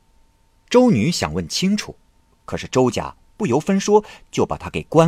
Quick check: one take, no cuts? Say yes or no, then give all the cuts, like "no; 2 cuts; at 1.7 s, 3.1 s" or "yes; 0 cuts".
yes; 0 cuts